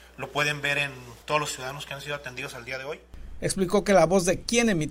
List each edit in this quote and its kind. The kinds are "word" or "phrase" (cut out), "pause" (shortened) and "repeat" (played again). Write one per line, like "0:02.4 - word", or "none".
0:01.2 - pause